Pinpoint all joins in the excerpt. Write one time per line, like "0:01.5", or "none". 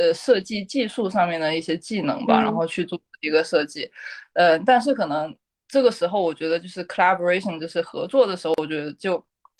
none

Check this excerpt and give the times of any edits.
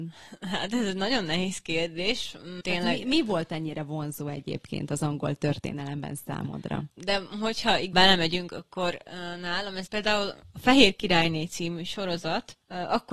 0:02.6
0:07.9
0:09.9

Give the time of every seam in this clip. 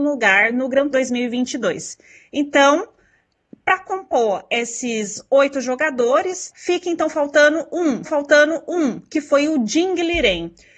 0:00.9
0:06.5
0:08.0

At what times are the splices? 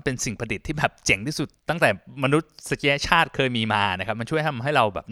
0:01.6

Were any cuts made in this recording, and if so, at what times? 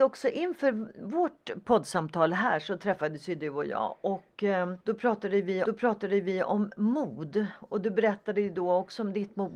0:04.8
0:05.7

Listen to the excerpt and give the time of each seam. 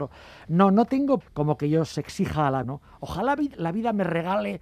0:01.2
0:01.9
0:02.6

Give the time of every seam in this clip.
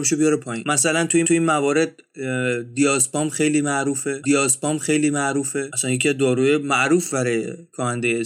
0:01.2
0:04.2

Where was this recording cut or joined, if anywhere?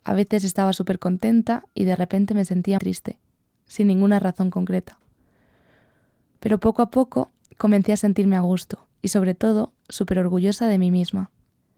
0:01.7
0:02.8
0:08.9

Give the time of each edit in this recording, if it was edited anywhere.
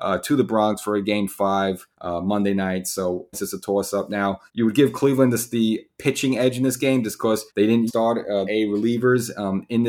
0:01.9
0:03.3
0:04.5
0:07.5
0:07.9
0:08.4

